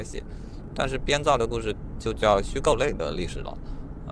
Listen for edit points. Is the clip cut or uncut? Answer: uncut